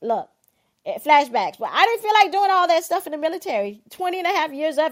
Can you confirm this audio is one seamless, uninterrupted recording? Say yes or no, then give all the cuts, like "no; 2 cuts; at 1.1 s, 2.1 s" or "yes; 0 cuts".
yes; 0 cuts